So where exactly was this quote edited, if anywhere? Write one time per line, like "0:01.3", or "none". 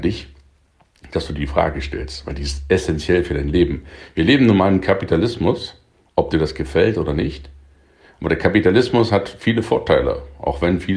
none